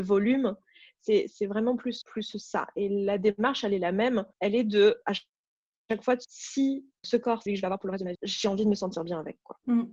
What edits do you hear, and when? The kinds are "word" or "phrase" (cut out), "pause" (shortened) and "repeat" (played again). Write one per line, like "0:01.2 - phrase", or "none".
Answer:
0:02.0 - word
0:04.3 - pause
0:05.0 - pause
0:06.2 - word
0:07.0 - word
0:07.5 - word
0:08.1 - word